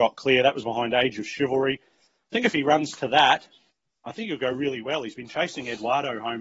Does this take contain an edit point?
no; 0 cuts

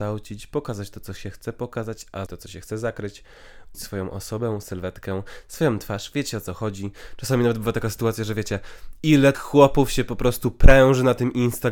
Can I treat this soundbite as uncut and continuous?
no; 4 cuts; at 2.3 s, 3.7 s, 4.6 s, 9.3 s

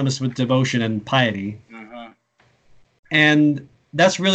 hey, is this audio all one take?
no; 1 cut; at 1.6 s

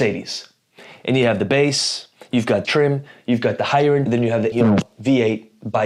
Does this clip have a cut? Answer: yes; 3 cuts; at 2.6 s, 4.1 s, 4.5 s

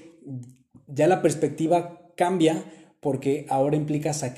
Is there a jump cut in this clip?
no; 0 cuts

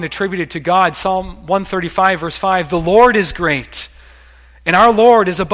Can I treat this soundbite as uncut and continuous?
yes; 0 cuts

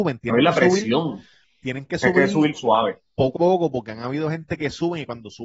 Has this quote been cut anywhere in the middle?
yes; 1 cut; at 3.4 s

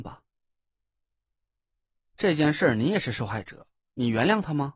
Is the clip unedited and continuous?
yes; 0 cuts

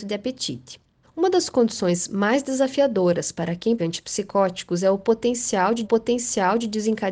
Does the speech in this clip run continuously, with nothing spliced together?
no; 3 cuts; at 1.0 s, 3.8 s, 5.8 s

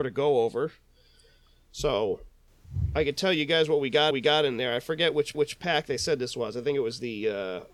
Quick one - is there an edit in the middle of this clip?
yes; 2 cuts; at 4.1 s, 5.3 s

